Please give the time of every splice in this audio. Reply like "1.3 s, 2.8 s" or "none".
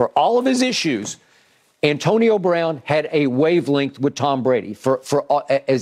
none